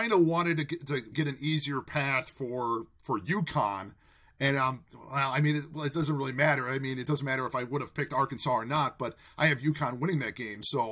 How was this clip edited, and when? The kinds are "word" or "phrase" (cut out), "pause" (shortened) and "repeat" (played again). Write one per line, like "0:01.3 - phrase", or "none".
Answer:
0:01.1 - word